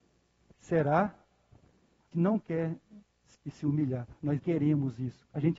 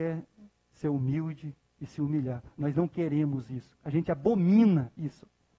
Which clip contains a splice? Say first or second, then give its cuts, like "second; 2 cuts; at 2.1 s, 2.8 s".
first; 3 cuts; at 2.1 s, 3.3 s, 4.4 s